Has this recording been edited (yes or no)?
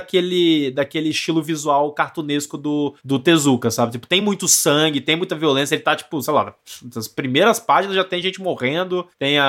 no